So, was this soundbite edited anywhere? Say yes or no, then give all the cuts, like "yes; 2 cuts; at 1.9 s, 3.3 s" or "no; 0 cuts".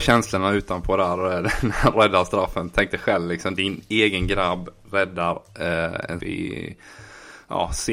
yes; 1 cut; at 6.2 s